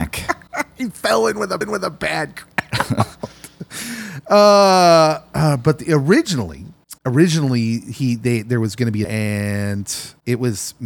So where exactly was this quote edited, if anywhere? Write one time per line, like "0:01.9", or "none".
0:01.6
0:07.0
0:09.0